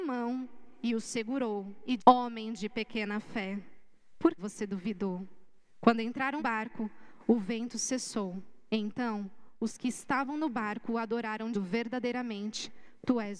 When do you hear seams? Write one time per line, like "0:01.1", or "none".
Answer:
0:02.0
0:04.4
0:06.4
0:11.5